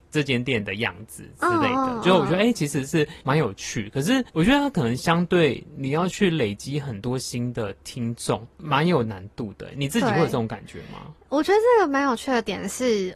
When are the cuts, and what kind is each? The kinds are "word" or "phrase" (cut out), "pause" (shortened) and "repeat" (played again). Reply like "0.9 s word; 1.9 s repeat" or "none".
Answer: 3.2 s pause; 4.3 s pause; 8.5 s pause